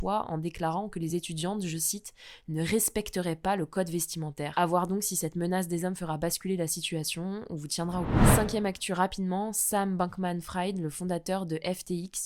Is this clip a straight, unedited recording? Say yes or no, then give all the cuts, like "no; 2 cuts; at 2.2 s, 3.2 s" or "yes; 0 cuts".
yes; 0 cuts